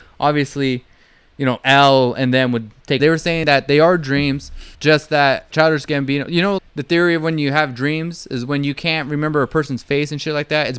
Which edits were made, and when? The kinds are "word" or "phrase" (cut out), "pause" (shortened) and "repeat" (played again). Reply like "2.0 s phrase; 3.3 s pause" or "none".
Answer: 3.0 s phrase; 4.7 s pause; 5.5 s word; 6.6 s word